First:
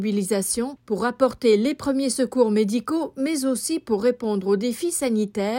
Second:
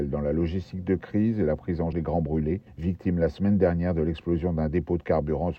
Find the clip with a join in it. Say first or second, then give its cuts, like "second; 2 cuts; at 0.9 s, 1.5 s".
second; 1 cut; at 1.9 s